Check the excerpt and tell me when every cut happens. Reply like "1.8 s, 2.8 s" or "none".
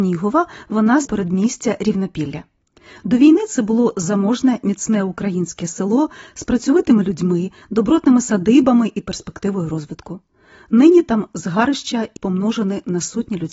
1.1 s, 12.2 s